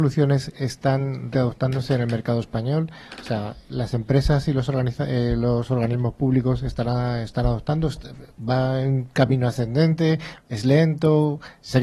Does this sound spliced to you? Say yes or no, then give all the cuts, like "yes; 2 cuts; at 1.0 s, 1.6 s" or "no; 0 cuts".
yes; 1 cut; at 1.3 s